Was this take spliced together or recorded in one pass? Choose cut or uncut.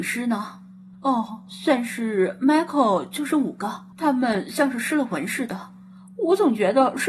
cut